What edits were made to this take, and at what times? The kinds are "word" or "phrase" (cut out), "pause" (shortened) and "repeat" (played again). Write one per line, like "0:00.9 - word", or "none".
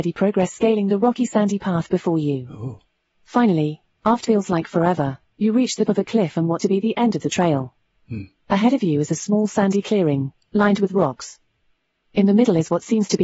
0:04.2 - word
0:05.9 - word
0:06.6 - word

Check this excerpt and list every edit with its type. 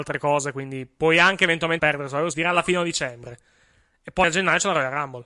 0:01.8 - word
0:02.3 - word
0:04.2 - word

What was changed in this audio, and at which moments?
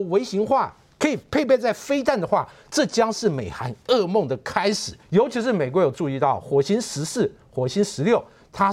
0:05.0 - pause

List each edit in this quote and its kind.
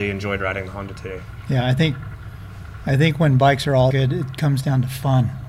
0:03.9 - word

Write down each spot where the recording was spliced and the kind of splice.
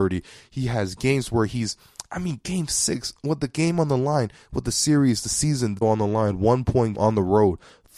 0:05.8 - word
0:06.9 - word

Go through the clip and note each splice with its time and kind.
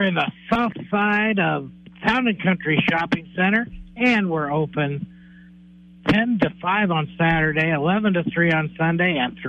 none

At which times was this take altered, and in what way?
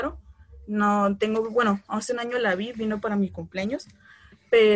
none

